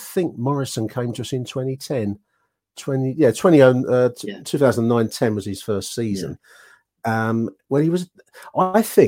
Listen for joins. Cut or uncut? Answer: uncut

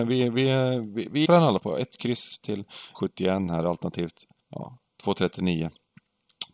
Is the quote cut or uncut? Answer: cut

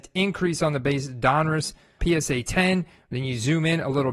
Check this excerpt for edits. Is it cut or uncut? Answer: cut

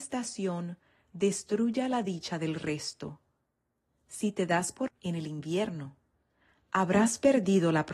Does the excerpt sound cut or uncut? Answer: cut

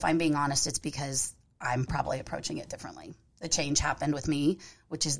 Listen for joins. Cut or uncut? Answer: uncut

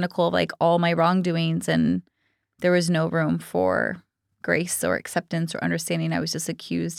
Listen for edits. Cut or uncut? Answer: uncut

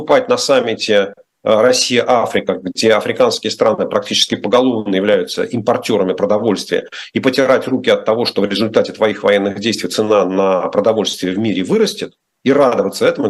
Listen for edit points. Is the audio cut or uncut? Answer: uncut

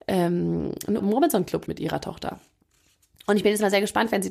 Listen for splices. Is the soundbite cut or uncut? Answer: cut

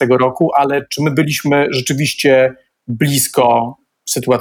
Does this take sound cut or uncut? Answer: uncut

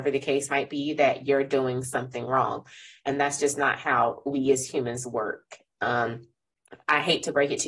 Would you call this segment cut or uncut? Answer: uncut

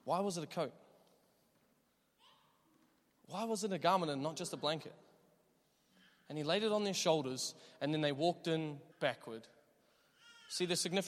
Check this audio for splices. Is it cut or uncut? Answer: cut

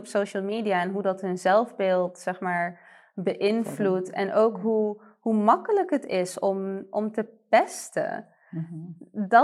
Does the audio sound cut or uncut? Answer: uncut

